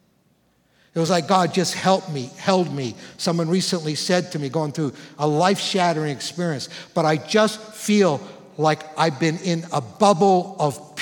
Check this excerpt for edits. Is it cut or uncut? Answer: uncut